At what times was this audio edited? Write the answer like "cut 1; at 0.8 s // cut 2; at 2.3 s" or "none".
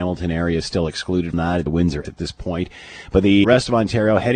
cut 1; at 1.3 s // cut 2; at 1.7 s // cut 3; at 2.0 s // cut 4; at 3.4 s